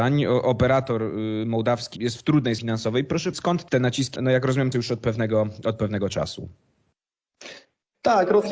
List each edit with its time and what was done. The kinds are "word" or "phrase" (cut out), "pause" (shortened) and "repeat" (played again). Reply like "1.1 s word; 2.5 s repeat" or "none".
2.0 s word; 2.6 s word; 3.3 s word; 3.7 s word; 4.2 s word; 4.7 s word